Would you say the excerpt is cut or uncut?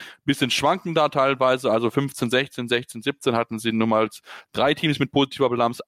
uncut